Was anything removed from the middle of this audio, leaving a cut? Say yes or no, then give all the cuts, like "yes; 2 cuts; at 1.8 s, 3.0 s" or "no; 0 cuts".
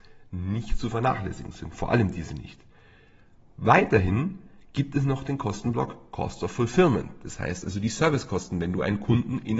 no; 0 cuts